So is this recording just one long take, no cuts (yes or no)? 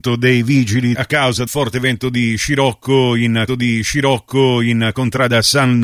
no